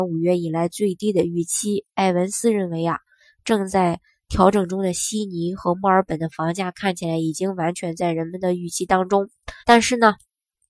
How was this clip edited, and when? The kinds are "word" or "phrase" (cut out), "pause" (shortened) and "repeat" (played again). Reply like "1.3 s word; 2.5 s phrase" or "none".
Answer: 9.6 s pause

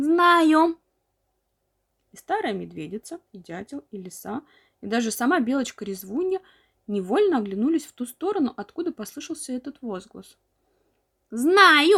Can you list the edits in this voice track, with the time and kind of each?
none

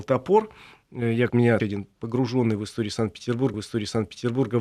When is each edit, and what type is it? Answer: 1.3 s word; 1.6 s word; 3.5 s repeat

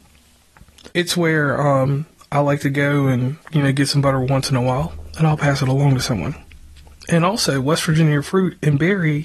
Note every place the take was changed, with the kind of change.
0.9 s pause; 2.2 s pause; 3.4 s pause

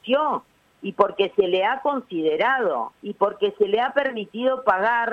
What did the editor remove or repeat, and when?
2.9 s pause

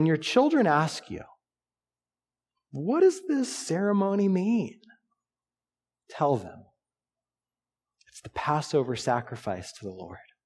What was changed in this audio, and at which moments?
none

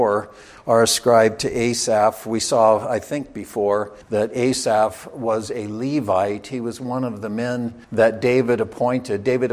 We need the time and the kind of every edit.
4.0 s pause; 7.8 s pause

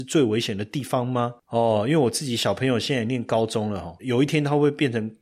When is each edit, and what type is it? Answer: 4.0 s phrase

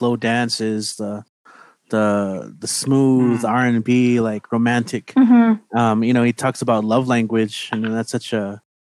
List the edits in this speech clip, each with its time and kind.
none

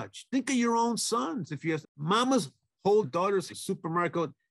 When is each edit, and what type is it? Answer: 1.8 s word; 3.0 s word; 3.5 s phrase

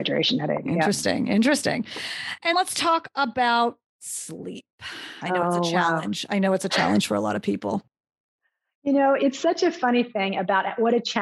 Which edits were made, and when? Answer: 2.5 s word

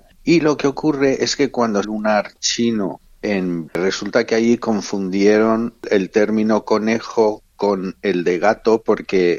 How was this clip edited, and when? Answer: 1.8 s phrase; 3.7 s word

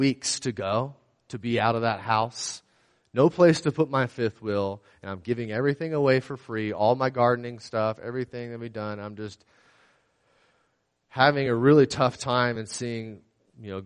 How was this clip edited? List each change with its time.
none

